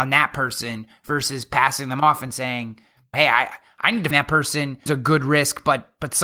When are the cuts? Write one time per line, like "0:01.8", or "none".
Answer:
0:03.1
0:04.1
0:04.9